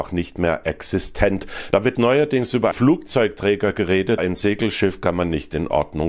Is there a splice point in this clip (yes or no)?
yes